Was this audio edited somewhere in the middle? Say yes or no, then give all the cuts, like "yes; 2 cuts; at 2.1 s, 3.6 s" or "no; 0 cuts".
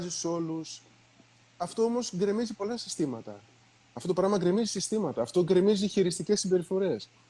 no; 0 cuts